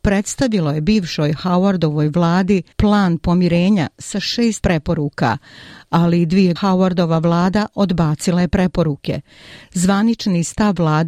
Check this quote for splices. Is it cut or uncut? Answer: cut